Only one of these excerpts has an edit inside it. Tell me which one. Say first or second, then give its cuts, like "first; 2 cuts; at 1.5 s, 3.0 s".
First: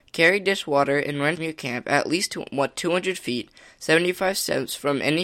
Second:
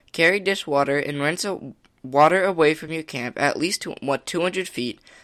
first; 1 cut; at 1.4 s